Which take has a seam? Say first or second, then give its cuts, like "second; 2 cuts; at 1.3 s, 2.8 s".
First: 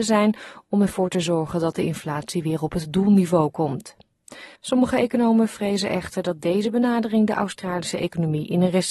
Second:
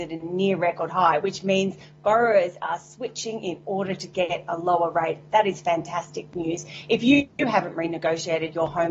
first; 1 cut; at 4.6 s